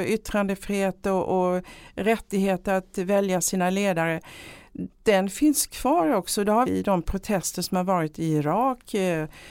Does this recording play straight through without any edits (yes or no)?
no